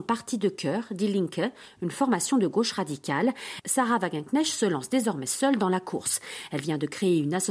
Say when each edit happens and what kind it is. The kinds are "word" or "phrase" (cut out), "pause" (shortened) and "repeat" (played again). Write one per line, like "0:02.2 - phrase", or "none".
none